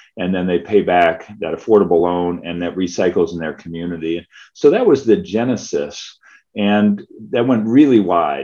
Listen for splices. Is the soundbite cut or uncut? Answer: uncut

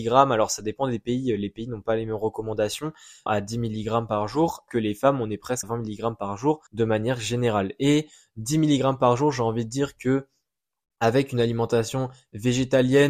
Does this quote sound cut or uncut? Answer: cut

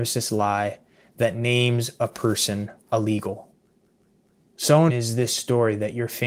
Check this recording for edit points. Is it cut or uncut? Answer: cut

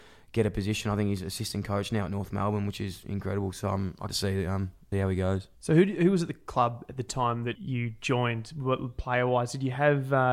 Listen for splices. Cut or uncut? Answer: cut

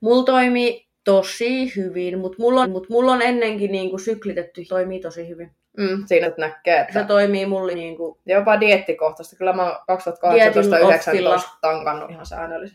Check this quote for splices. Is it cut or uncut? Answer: cut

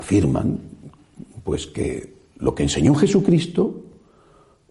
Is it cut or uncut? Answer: uncut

